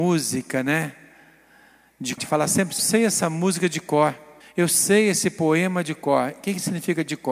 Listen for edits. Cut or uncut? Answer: cut